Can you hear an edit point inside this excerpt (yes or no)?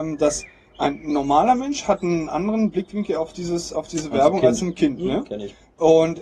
no